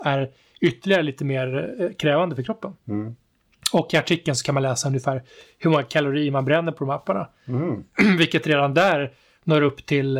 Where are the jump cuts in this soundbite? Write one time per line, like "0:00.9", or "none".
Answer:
none